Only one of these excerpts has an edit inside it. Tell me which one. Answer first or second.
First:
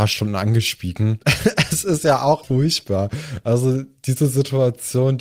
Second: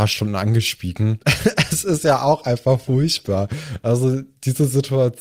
first